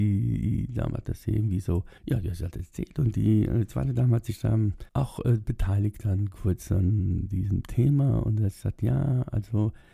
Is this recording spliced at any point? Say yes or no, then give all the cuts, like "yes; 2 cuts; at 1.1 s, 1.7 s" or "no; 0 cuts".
yes; 2 cuts; at 2.0 s, 4.9 s